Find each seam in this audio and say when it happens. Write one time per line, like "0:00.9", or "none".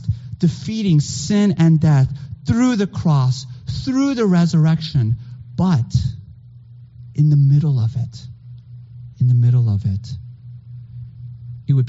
none